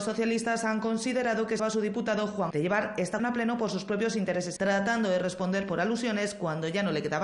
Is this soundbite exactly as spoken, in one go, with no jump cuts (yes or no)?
no